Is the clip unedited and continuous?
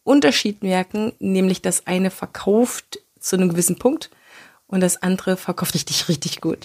no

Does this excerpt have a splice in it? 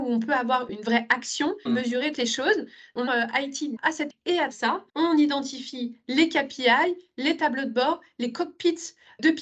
yes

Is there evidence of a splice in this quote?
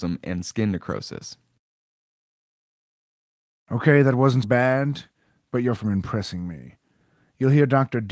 yes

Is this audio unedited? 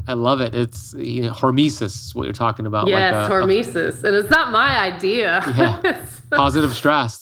yes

